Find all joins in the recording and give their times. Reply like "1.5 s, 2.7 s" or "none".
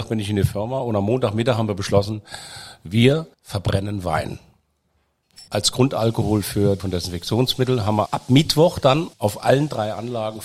3.3 s, 5.5 s, 6.8 s, 8.1 s, 9.1 s